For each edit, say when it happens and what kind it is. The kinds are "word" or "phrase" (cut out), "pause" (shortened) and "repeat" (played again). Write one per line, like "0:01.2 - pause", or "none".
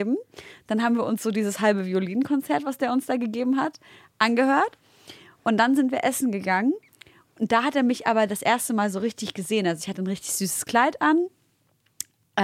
none